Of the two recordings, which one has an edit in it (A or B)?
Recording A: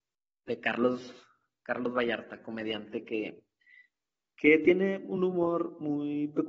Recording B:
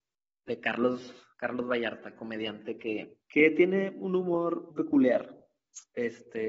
B